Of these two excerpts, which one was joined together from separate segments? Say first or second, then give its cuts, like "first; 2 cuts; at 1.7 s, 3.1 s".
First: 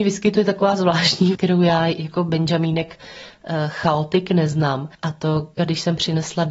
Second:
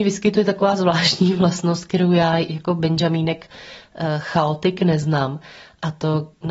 first; 3 cuts; at 1.3 s, 4.9 s, 5.6 s